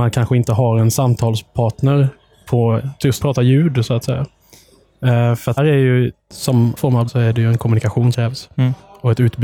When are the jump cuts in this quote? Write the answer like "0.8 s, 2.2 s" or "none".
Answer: 3.2 s, 5.6 s, 6.8 s, 7.1 s, 8.1 s